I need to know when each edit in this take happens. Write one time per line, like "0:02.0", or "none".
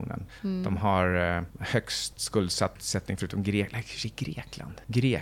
none